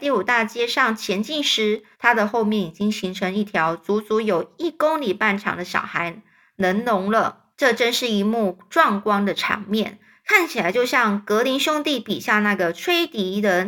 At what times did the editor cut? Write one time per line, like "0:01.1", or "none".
0:01.9
0:07.5